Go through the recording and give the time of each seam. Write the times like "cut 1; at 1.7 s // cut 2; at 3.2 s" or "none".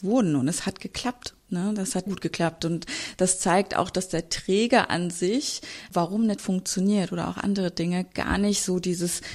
cut 1; at 2.1 s // cut 2; at 6.4 s